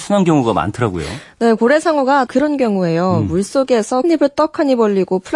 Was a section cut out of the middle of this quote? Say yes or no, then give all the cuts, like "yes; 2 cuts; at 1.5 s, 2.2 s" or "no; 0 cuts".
yes; 2 cuts; at 2.3 s, 4.0 s